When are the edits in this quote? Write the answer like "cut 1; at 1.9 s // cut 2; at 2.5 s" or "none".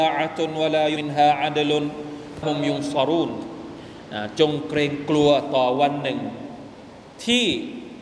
cut 1; at 1.0 s // cut 2; at 2.4 s